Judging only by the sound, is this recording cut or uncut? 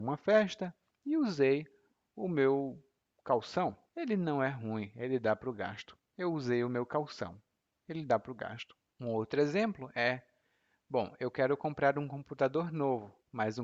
uncut